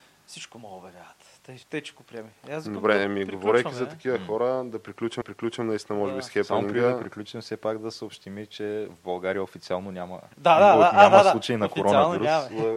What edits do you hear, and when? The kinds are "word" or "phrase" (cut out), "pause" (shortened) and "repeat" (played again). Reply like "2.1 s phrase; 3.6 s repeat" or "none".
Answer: 1.6 s pause; 5.2 s repeat; 10.3 s pause